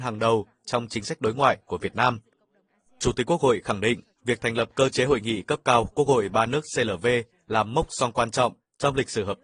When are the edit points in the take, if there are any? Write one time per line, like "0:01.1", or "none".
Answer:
none